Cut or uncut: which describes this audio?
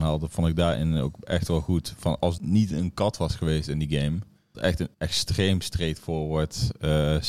cut